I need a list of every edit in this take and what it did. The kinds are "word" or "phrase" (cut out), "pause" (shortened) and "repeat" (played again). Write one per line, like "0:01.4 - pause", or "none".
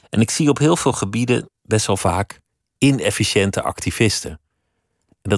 none